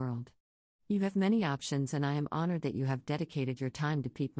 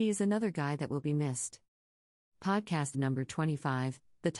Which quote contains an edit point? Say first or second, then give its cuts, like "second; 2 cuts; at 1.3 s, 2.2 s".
second; 1 cut; at 2.9 s